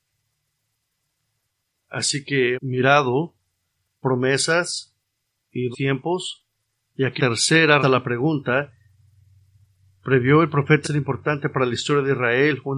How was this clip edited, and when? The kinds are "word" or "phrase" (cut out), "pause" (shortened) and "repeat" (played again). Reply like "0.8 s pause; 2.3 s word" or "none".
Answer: 2.5 s word; 4.0 s word; 5.7 s word; 7.2 s word; 7.8 s word; 10.8 s word